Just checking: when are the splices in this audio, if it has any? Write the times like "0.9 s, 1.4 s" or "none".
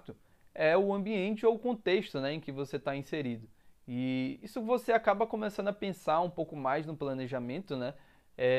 none